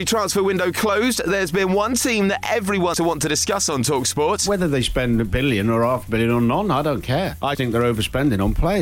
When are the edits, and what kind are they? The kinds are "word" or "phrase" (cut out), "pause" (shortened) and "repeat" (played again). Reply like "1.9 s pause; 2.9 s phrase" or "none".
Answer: 2.9 s word; 7.5 s word